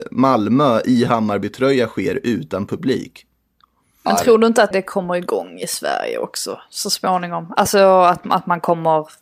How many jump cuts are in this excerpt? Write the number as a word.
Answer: one